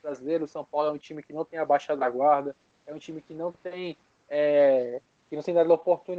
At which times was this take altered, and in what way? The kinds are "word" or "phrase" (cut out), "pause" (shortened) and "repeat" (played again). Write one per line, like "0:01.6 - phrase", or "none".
none